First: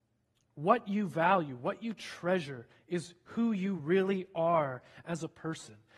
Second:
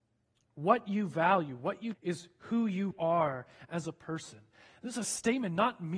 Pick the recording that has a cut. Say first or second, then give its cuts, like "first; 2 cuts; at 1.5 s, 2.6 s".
second; 2 cuts; at 1.9 s, 2.9 s